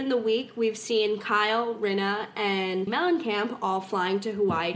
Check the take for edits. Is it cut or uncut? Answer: cut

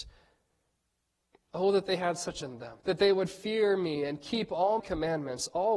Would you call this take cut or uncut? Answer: cut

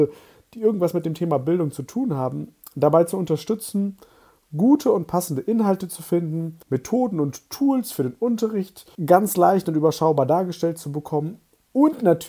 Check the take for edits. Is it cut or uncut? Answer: cut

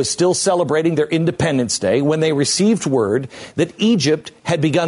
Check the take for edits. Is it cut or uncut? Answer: uncut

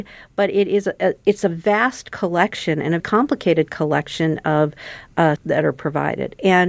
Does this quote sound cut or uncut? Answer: cut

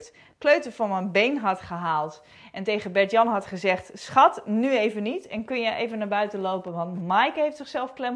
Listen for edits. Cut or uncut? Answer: uncut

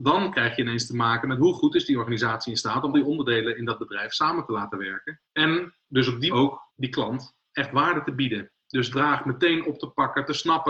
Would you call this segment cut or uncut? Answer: cut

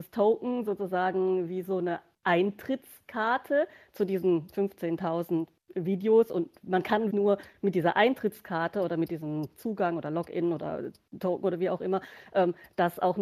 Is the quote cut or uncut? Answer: cut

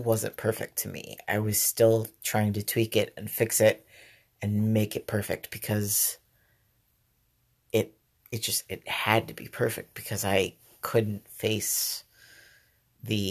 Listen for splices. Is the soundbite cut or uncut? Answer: uncut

